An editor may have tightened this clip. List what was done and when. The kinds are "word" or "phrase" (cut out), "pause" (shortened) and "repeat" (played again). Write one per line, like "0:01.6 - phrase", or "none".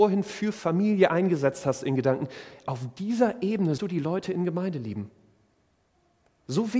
0:03.8 - word